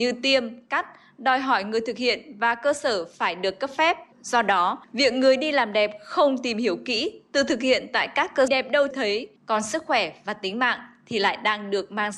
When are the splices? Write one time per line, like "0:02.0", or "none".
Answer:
0:04.1
0:04.8
0:08.5
0:08.9
0:09.4

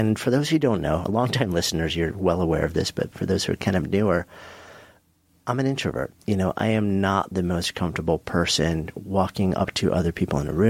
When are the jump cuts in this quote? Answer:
none

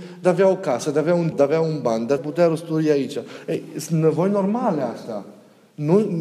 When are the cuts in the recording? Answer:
0:01.3
0:02.2

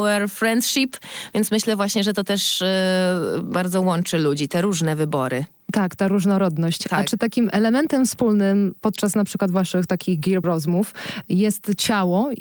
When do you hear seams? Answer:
0:10.4

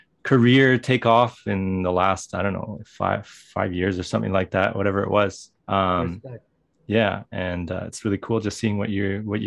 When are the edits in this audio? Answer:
0:05.6

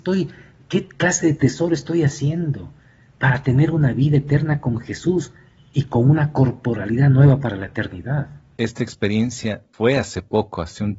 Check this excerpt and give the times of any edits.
none

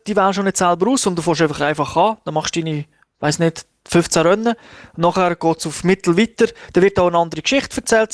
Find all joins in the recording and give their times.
none

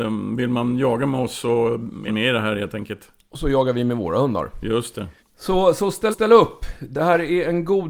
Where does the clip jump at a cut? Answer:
0:02.1
0:05.2
0:06.1

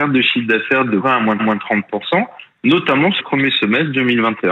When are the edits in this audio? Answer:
0:01.0
0:01.4
0:03.2

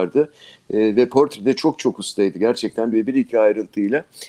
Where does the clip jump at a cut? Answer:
0:02.9

